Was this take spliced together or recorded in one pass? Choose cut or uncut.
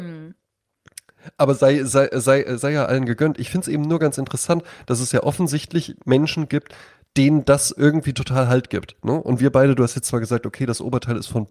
uncut